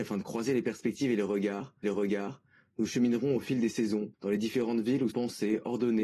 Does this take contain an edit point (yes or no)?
yes